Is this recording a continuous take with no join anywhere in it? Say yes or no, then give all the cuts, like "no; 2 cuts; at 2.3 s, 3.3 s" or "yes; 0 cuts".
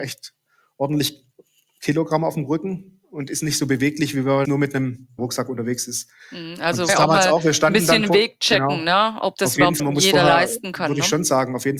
no; 5 cuts; at 4.4 s, 5.2 s, 6.9 s, 9.3 s, 9.8 s